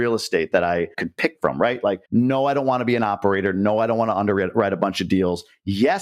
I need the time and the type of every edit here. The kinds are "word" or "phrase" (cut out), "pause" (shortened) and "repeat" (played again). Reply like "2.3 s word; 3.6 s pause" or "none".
2.1 s pause